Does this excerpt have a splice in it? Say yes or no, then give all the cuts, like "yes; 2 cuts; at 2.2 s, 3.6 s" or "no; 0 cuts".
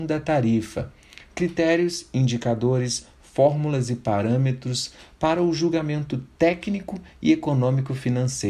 no; 0 cuts